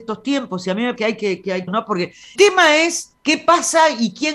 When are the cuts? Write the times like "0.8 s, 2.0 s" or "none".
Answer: 1.0 s, 1.7 s, 2.3 s, 3.2 s